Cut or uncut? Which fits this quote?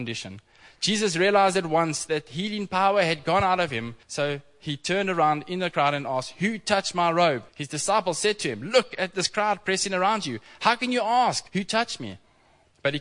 cut